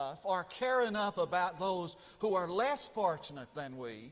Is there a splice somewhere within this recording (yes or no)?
no